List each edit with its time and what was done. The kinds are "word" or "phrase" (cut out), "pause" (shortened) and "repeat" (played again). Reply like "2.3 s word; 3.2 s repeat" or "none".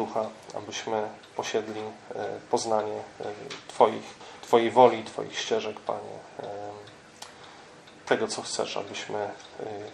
4.2 s pause